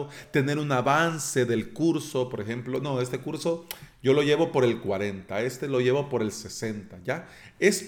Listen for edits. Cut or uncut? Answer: uncut